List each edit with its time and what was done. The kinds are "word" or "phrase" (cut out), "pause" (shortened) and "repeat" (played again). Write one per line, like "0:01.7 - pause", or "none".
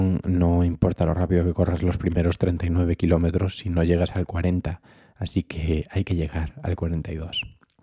none